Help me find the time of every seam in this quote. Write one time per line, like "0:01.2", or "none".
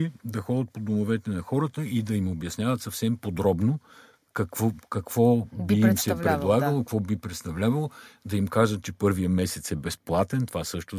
none